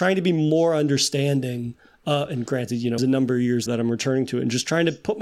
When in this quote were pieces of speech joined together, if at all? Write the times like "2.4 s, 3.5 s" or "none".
3.0 s, 3.7 s